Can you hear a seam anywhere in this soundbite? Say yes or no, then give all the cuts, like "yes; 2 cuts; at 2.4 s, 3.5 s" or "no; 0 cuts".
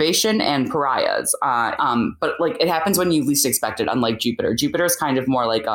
yes; 1 cut; at 1.8 s